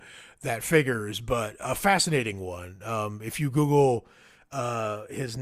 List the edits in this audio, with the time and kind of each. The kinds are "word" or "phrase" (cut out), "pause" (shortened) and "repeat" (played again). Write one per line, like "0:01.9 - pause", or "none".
none